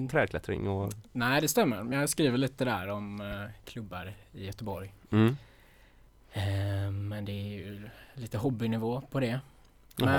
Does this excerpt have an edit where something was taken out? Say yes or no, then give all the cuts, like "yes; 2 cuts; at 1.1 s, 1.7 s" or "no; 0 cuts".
no; 0 cuts